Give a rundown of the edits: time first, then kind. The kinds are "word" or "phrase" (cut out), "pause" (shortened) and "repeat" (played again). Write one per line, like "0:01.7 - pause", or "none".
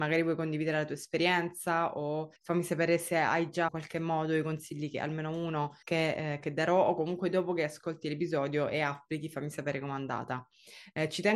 0:02.4 - pause
0:03.7 - phrase
0:05.8 - pause